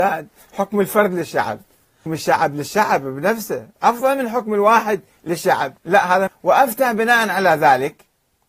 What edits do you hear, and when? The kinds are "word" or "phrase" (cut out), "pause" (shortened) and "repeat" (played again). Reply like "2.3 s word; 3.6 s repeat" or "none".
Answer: 2.1 s word; 5.8 s pause; 6.3 s phrase